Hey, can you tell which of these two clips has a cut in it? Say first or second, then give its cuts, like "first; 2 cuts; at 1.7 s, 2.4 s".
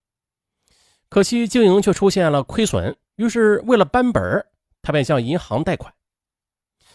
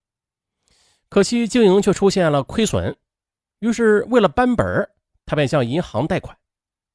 first; 1 cut; at 3.1 s